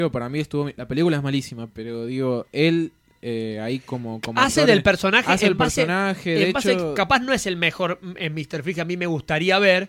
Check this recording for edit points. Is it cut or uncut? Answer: uncut